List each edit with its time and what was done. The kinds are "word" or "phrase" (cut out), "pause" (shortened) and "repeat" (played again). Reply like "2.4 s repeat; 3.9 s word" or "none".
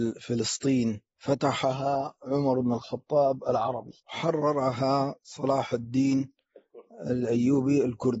1.1 s pause; 4.0 s pause